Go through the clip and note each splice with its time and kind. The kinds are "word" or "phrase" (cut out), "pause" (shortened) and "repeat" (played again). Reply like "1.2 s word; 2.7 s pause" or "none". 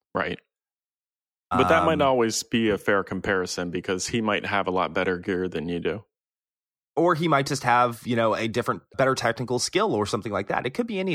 8.9 s word

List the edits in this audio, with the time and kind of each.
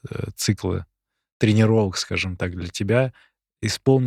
none

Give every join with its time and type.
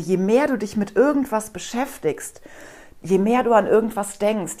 none

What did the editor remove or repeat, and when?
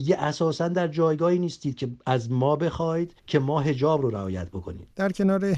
3.2 s pause

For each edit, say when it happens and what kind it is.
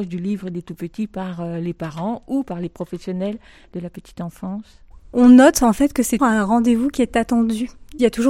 6.2 s word

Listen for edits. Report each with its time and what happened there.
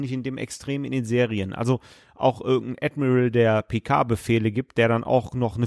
none

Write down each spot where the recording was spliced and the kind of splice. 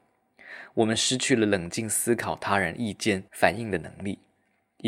3.3 s pause

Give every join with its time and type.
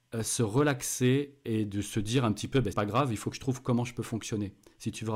2.7 s word

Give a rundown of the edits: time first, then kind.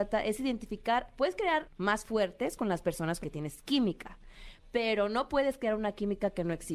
1.6 s word; 3.2 s word

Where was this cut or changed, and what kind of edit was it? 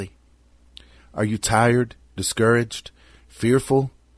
none

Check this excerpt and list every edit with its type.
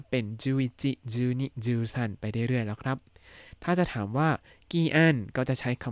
none

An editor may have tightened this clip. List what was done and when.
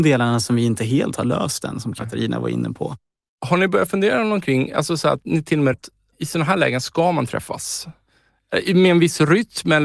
5.7 s word

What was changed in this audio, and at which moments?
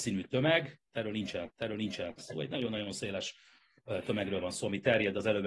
1.5 s repeat

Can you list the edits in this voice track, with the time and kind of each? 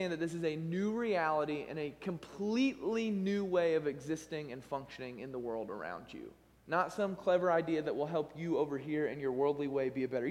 6.5 s pause

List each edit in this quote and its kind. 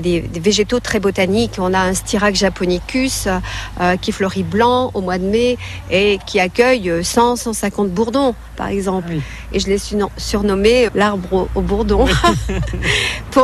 10.9 s word

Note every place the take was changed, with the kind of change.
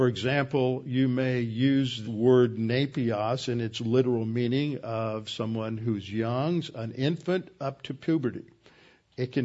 2.0 s word

